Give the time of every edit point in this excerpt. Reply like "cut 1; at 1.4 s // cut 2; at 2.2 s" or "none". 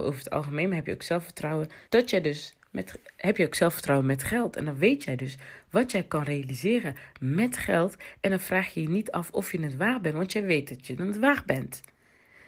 cut 1; at 1.9 s